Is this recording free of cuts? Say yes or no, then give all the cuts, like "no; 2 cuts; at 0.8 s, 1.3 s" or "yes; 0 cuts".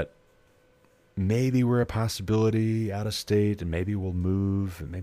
yes; 0 cuts